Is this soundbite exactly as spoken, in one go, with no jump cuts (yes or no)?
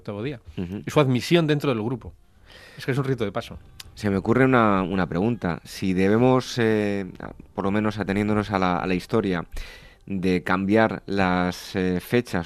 yes